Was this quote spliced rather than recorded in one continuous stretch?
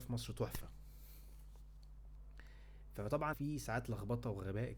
yes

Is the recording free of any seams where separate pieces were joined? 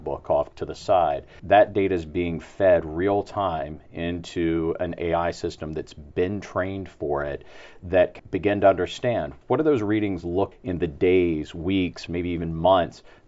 no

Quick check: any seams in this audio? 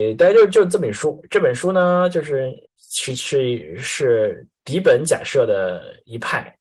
yes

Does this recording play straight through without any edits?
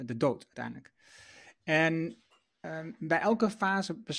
yes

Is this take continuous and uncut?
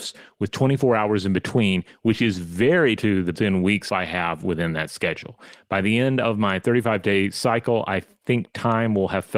no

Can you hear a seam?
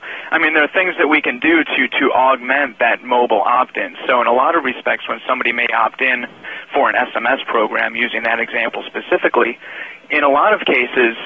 no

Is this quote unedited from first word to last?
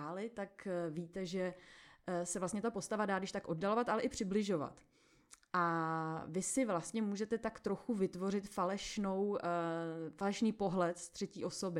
yes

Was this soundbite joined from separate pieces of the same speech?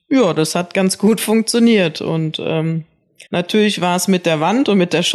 yes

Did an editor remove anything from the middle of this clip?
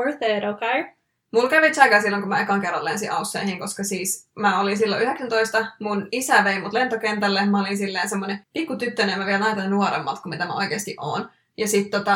yes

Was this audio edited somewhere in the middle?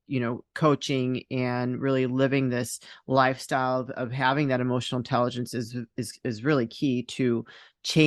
no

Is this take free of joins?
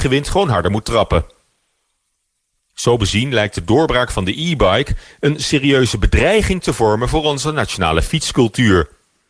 yes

